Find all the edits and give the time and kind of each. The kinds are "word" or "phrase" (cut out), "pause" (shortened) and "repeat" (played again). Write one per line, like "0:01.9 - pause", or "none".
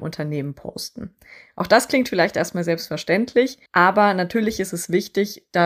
0:03.7 - pause